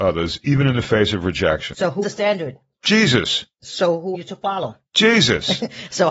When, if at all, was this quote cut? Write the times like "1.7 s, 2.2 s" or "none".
2.0 s, 4.1 s

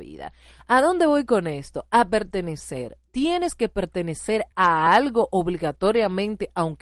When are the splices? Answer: none

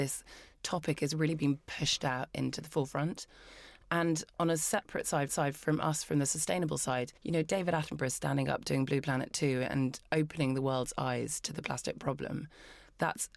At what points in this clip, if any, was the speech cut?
5.3 s, 7.2 s

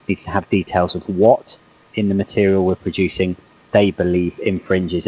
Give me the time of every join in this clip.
none

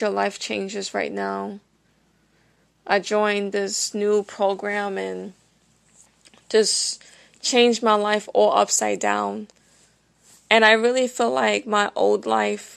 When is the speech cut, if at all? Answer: none

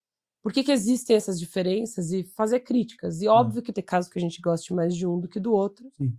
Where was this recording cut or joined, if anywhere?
3.7 s

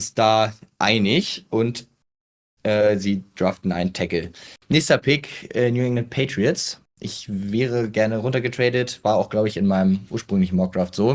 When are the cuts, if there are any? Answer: none

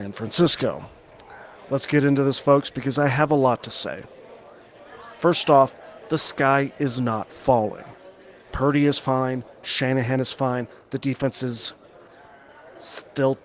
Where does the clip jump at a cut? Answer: none

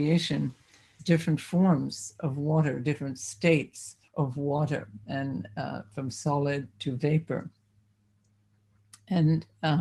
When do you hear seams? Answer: 1.0 s, 4.1 s, 5.0 s, 6.7 s

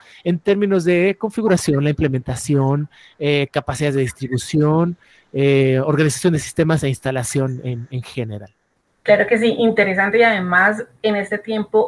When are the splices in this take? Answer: none

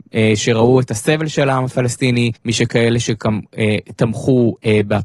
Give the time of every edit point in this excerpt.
2.4 s

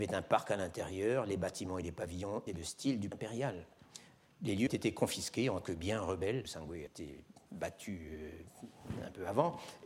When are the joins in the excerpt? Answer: 2.5 s, 3.1 s, 4.7 s, 5.6 s, 6.4 s, 6.9 s

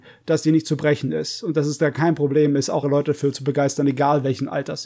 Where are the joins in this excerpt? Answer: 2.8 s

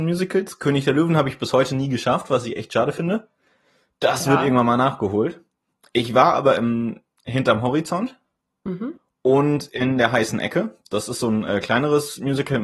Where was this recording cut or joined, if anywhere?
none

